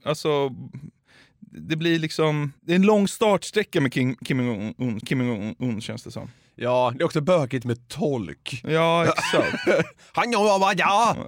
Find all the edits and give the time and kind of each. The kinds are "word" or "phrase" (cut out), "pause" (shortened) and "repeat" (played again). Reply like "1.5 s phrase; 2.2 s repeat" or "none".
2.6 s pause; 5.0 s repeat